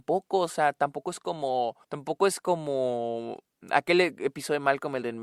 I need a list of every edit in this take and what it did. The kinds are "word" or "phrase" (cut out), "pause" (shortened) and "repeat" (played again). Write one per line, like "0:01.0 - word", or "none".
0:01.8 - pause